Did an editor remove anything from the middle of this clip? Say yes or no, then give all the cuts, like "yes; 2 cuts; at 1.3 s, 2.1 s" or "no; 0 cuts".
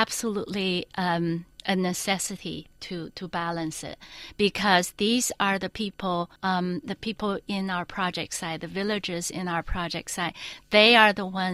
yes; 1 cut; at 6.4 s